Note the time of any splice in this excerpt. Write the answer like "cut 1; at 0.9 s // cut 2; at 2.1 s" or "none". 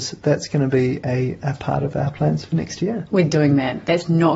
cut 1; at 3.3 s